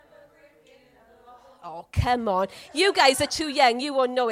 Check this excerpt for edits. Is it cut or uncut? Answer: uncut